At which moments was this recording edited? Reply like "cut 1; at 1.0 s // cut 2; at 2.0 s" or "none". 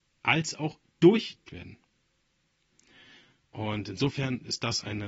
cut 1; at 1.5 s